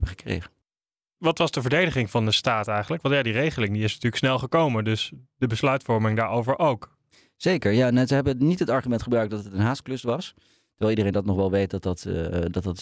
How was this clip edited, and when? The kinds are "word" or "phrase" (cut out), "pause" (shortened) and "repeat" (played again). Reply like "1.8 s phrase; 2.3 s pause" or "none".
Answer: none